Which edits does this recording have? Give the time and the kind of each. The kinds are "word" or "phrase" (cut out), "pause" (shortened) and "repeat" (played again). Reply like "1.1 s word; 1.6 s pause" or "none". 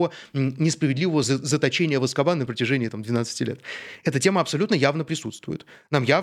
none